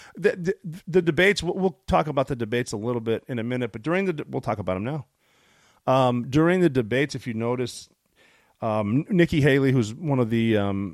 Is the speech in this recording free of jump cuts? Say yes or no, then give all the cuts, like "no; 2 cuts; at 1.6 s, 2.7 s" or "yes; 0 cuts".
yes; 0 cuts